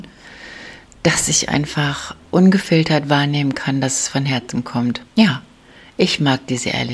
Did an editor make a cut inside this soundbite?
yes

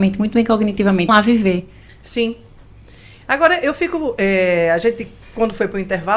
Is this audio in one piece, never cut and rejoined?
no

